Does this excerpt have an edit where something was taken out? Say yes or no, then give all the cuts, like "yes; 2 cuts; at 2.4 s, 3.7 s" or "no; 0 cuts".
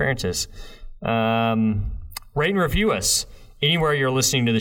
no; 0 cuts